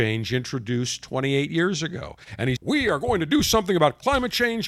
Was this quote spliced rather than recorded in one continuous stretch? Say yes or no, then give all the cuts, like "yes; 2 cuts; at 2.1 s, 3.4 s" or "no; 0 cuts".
yes; 1 cut; at 2.6 s